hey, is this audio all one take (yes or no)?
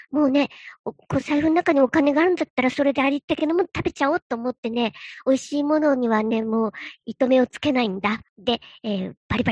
no